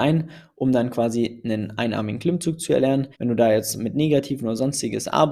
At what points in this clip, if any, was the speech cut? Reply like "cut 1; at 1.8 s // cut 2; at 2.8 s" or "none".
cut 1; at 3.1 s